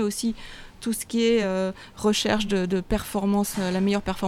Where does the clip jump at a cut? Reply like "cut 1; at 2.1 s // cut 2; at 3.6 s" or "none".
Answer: none